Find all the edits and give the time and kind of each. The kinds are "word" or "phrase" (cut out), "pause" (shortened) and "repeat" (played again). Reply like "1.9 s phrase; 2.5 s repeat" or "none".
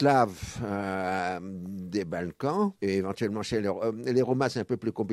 2.8 s pause